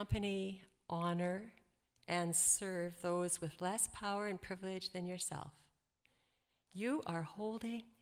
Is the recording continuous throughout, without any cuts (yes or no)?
yes